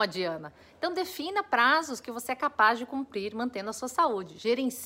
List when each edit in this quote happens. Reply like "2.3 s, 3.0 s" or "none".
none